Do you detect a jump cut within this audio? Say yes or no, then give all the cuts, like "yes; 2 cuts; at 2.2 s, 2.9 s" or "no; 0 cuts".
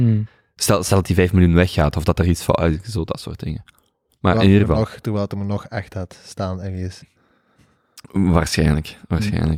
no; 0 cuts